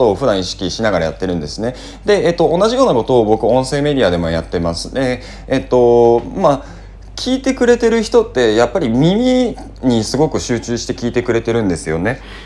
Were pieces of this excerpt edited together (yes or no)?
no